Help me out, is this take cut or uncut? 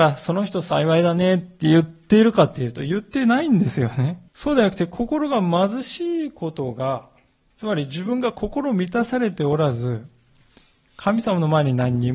cut